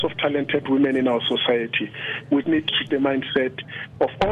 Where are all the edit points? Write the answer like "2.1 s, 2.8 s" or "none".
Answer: 2.4 s, 2.9 s